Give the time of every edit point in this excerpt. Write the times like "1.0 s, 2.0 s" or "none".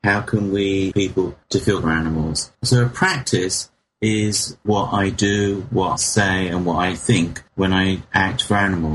0.9 s, 1.4 s, 1.8 s, 2.5 s, 4.6 s, 6.0 s, 7.5 s